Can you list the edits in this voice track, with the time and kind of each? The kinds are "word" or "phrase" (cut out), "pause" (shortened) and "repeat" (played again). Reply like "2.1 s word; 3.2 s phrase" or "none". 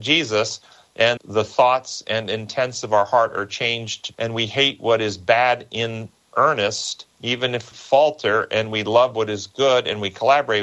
1.2 s word; 4.1 s word; 7.1 s pause; 7.7 s word